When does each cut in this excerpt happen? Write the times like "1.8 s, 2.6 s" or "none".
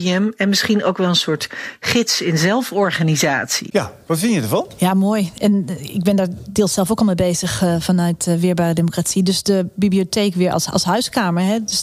none